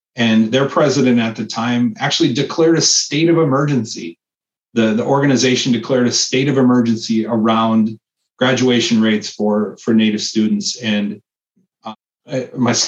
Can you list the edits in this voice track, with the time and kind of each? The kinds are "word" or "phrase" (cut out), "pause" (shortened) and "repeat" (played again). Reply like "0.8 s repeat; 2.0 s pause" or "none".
none

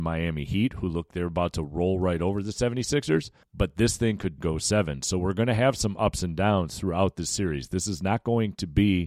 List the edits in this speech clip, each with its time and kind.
1.1 s word; 3.4 s pause; 4.4 s word

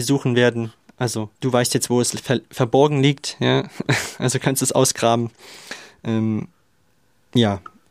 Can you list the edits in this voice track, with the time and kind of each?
1.4 s pause

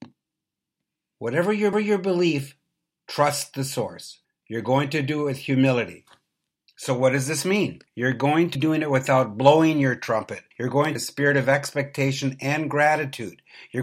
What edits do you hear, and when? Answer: 1.7 s repeat; 4.2 s pause; 7.9 s pause; 8.5 s word; 10.5 s pause; 11.0 s phrase

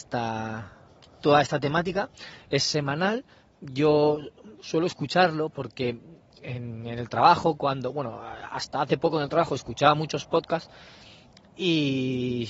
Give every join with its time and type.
none

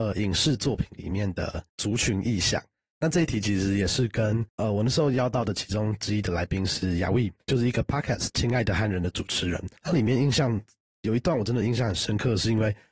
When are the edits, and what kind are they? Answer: 1.7 s pause; 4.5 s pause; 7.4 s pause; 9.8 s pause

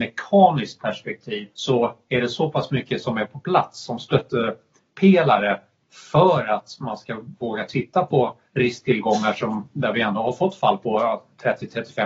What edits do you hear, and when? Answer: 1.5 s pause

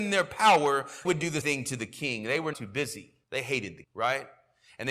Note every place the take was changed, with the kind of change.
1.0 s word; 1.4 s word; 2.5 s word; 3.2 s pause; 3.8 s word

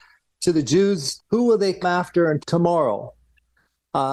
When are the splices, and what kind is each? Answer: 1.2 s word; 1.8 s word; 2.4 s word

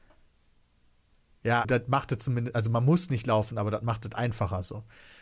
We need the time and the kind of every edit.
1.6 s word

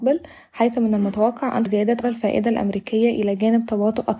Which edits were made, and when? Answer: 1.7 s word; 2.0 s word

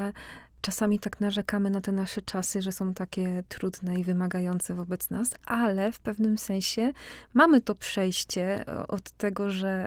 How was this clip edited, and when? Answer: none

